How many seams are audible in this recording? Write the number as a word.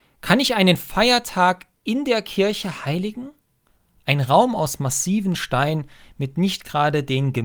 zero